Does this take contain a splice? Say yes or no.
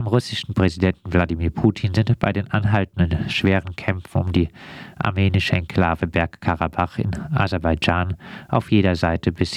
no